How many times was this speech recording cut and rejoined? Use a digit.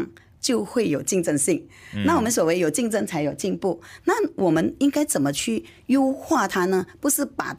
0